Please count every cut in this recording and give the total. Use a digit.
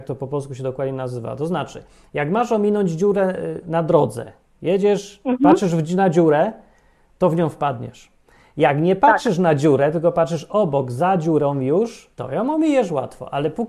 1